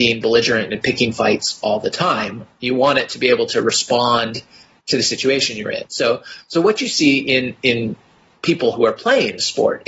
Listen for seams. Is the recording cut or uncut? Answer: uncut